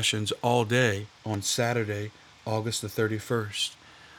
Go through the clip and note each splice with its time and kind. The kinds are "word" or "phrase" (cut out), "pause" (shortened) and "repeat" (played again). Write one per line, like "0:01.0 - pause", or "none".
none